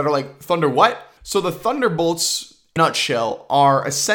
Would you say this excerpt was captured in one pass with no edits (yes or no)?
no